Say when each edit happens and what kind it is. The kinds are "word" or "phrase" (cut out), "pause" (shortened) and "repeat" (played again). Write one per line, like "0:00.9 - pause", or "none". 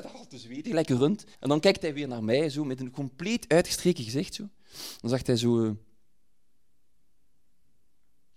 0:01.3 - pause